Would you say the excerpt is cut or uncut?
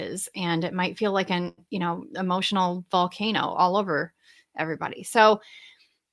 uncut